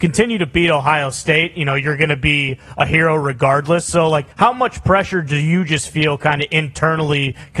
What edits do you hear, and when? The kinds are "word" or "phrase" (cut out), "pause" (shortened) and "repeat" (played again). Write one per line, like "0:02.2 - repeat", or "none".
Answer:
0:04.3 - pause